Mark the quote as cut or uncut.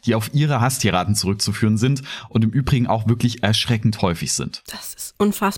uncut